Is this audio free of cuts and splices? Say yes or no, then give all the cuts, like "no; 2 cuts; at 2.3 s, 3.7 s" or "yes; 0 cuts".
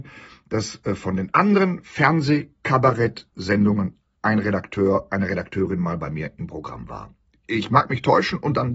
yes; 0 cuts